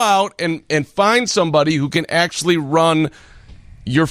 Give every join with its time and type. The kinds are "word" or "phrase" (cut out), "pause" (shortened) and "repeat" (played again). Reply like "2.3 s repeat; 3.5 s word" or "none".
none

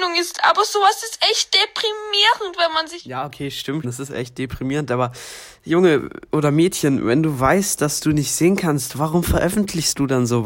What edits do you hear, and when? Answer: 3.8 s word

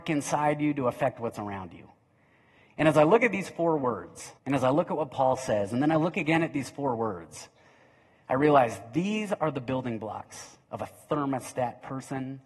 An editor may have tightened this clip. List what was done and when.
4.4 s pause; 10.6 s pause

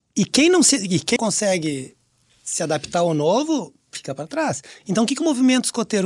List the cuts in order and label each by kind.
1.2 s word

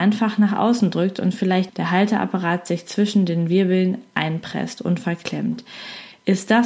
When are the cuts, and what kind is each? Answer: 1.7 s word

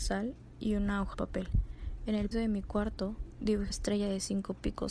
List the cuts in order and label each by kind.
1.1 s word; 2.3 s word; 3.7 s word

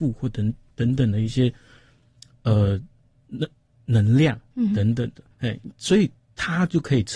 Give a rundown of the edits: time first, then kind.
5.3 s pause

